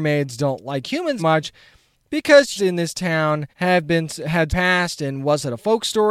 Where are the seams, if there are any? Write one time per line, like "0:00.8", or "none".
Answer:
0:01.2
0:02.6
0:03.5
0:04.5